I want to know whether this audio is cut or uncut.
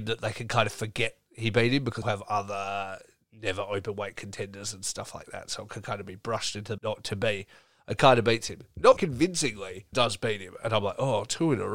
cut